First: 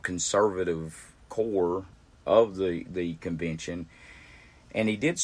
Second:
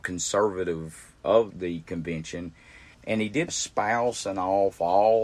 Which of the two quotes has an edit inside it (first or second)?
second